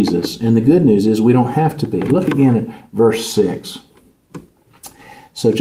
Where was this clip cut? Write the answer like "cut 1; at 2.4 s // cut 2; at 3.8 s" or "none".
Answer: none